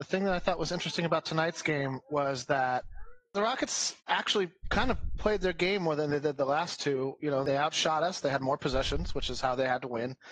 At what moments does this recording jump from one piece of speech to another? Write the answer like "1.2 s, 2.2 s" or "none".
4.0 s